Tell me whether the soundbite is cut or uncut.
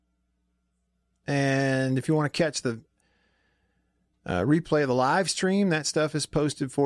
uncut